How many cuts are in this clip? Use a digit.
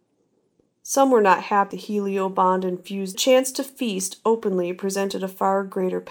2